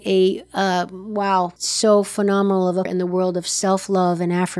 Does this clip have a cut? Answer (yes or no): yes